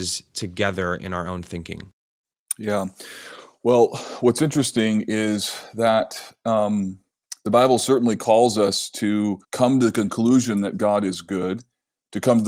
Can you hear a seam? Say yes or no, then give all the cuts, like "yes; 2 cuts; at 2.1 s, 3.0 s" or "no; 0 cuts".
yes; 1 cut; at 9.4 s